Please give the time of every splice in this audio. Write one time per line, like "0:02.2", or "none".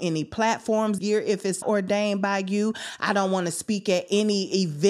0:01.0
0:01.6